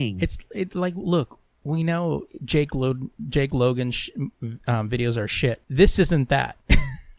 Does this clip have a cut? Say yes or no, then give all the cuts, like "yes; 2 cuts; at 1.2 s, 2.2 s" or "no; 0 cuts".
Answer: yes; 1 cut; at 5.6 s